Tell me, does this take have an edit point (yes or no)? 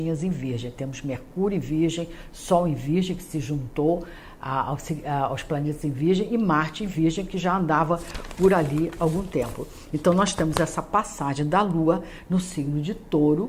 no